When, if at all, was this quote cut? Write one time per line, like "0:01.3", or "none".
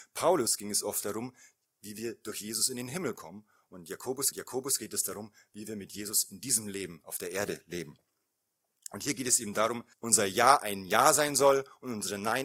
0:04.3
0:09.9